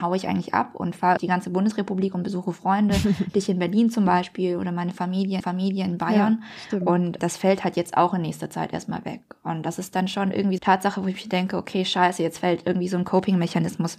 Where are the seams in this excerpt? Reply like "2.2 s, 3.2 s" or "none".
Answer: 1.2 s, 5.4 s, 7.2 s, 10.6 s